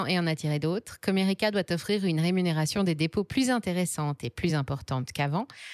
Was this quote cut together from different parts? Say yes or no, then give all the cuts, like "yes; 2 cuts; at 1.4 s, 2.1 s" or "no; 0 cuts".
no; 0 cuts